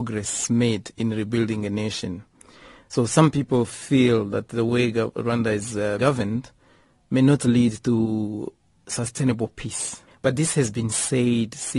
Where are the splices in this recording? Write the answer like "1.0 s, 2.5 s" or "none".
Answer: 6.0 s, 10.1 s